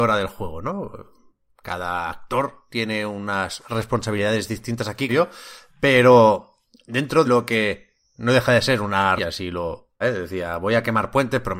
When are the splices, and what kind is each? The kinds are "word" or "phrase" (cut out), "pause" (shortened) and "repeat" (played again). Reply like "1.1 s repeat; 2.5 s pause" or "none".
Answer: 5.1 s word; 7.2 s word; 9.2 s word; 10.0 s word